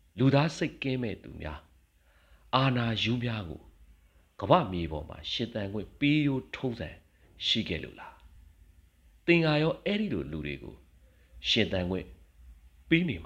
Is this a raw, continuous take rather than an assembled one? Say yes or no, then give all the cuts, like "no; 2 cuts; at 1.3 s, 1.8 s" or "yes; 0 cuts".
yes; 0 cuts